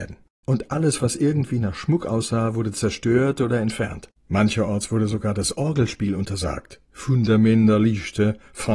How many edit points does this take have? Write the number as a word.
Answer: one